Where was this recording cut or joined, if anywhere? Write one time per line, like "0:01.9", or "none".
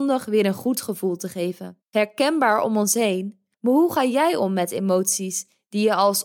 0:01.8
0:03.5